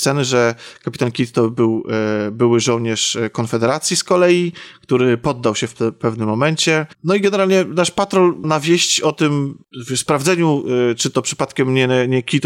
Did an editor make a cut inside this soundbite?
yes; 2 cuts; at 6.9 s, 8.4 s

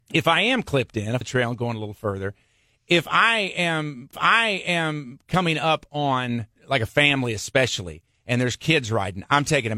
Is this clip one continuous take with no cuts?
no; 3 cuts; at 1.2 s, 4.1 s, 6.6 s

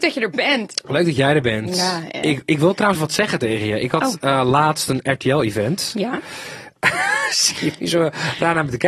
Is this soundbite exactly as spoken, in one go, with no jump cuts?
no; 2 cuts; at 3.0 s, 7.8 s

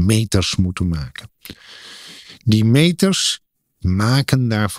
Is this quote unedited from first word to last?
no; 1 cut; at 3.8 s

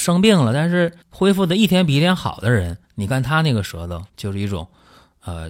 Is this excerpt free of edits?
no; 3 cuts; at 1.0 s, 2.8 s, 4.1 s

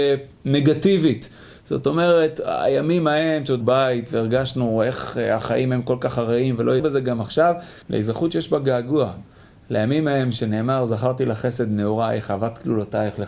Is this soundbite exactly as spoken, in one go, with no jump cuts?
no; 3 cuts; at 3.6 s, 6.8 s, 7.8 s

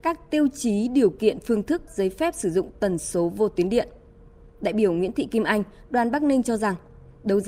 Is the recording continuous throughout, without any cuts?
no; 1 cut; at 1.9 s

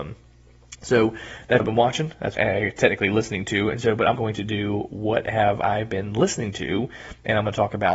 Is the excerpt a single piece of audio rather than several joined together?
no; 3 cuts; at 1.6 s, 2.3 s, 4.1 s

